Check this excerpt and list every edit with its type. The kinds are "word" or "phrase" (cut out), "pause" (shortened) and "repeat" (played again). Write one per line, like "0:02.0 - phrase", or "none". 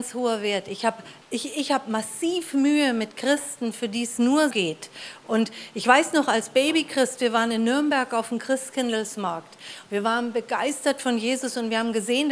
0:01.2 - pause
0:04.5 - word